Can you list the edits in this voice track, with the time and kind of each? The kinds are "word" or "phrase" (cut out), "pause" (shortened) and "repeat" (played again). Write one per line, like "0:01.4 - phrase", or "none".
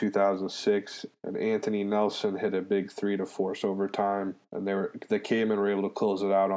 0:01.2 - pause
0:04.4 - pause